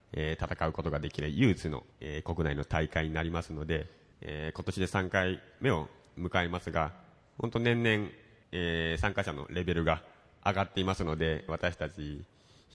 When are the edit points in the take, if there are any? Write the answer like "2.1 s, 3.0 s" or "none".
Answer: 1.9 s, 11.5 s